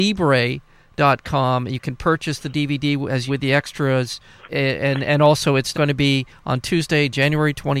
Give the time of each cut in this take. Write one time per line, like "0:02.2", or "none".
0:03.3
0:04.5
0:05.7